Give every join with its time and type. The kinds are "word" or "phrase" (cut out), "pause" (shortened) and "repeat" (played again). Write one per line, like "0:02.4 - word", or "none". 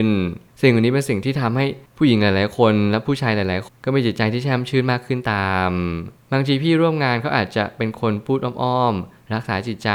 0:03.7 - phrase

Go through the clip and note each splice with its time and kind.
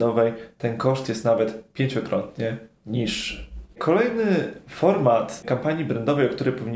none

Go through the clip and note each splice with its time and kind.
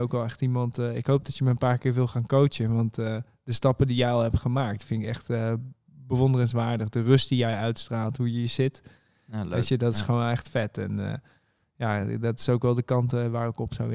none

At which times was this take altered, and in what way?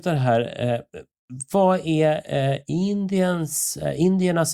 none

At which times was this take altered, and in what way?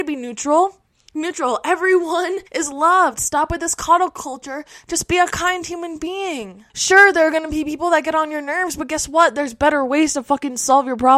0:02.5 - pause
0:06.7 - pause

